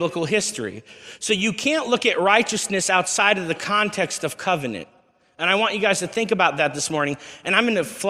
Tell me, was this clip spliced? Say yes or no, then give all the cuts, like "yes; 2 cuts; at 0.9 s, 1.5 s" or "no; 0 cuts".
no; 0 cuts